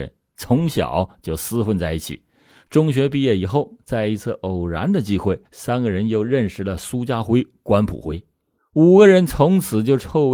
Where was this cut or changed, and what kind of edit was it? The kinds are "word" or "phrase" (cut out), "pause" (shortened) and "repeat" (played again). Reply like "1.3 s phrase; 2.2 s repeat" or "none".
5.5 s pause; 8.6 s pause